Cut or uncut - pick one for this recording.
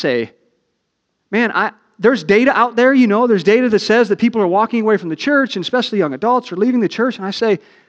uncut